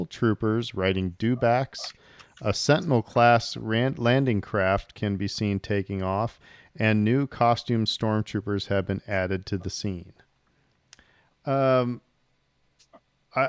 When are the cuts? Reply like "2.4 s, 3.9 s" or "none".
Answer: none